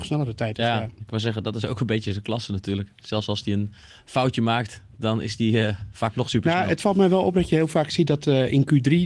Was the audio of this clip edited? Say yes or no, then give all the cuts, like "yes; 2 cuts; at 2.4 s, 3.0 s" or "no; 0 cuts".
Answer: no; 0 cuts